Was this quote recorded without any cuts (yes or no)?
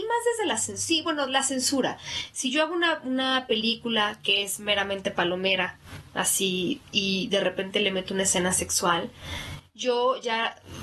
yes